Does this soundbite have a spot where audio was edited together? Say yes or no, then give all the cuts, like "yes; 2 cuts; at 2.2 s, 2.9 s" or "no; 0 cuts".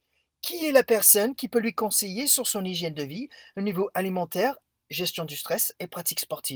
no; 0 cuts